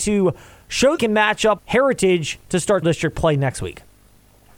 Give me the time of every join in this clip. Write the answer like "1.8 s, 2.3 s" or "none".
1.0 s, 1.6 s, 2.8 s